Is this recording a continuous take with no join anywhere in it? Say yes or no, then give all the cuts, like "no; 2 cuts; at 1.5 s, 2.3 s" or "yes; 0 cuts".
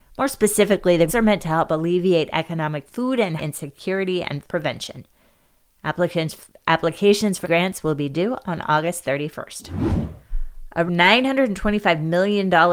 no; 6 cuts; at 1.1 s, 2.9 s, 3.4 s, 4.4 s, 7.4 s, 10.9 s